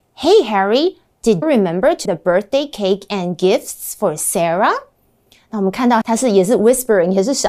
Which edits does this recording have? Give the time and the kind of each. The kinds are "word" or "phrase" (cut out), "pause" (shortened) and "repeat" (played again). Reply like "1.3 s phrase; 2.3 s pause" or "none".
1.4 s word; 2.0 s word; 6.0 s word